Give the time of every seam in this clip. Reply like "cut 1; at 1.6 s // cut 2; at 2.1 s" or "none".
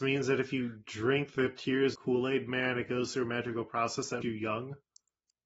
cut 1; at 1.9 s // cut 2; at 4.2 s